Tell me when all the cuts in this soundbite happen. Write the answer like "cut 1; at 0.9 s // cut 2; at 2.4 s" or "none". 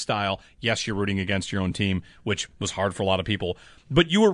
none